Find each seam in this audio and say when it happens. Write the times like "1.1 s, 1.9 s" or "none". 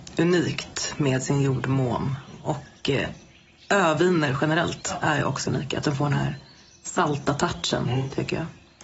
5.5 s